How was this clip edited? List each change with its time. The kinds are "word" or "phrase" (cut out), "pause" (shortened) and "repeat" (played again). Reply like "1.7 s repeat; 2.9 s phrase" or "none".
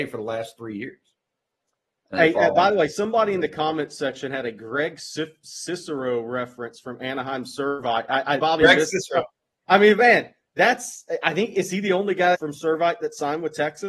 8.4 s word; 12.3 s word